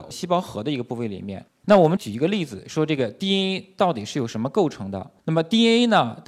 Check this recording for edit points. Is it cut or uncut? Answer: uncut